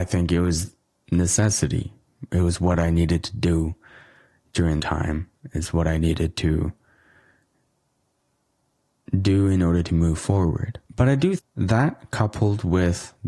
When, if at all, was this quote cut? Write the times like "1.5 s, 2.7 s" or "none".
4.8 s, 10.9 s, 11.4 s